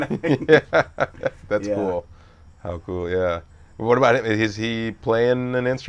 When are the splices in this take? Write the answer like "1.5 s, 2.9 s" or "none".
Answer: none